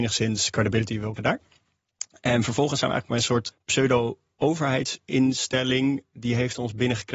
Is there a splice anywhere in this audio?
yes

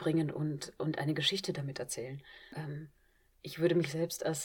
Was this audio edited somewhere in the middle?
no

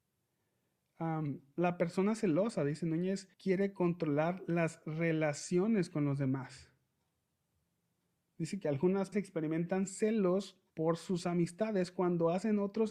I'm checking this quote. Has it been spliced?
yes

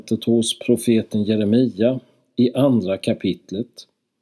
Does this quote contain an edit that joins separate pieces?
no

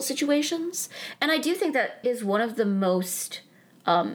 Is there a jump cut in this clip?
yes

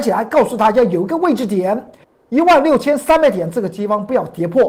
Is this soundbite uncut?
no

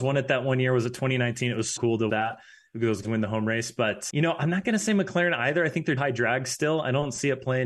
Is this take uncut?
no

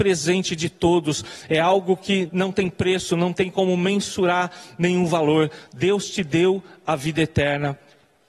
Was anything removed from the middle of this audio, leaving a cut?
yes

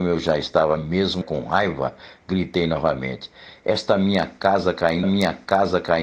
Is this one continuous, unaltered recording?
no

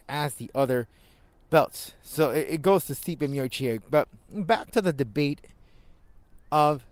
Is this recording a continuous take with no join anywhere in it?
yes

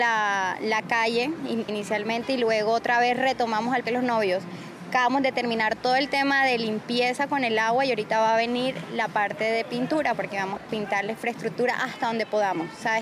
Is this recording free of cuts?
no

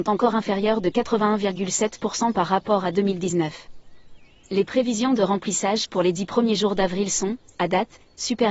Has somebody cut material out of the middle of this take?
no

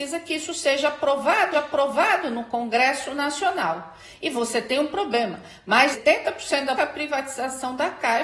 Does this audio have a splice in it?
yes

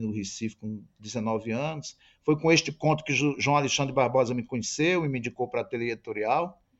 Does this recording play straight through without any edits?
yes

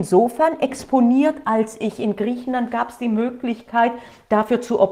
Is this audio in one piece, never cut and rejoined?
yes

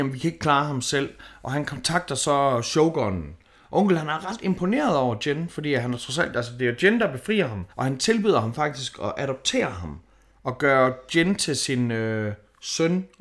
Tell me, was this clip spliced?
yes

